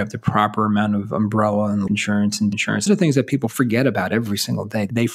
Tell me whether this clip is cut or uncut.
cut